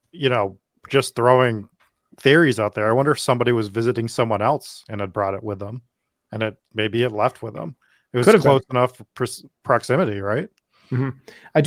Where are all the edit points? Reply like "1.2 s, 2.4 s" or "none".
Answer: none